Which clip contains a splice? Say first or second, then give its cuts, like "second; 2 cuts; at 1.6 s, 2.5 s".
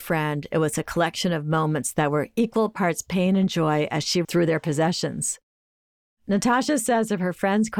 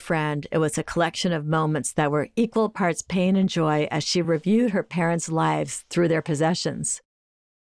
first; 1 cut; at 4.2 s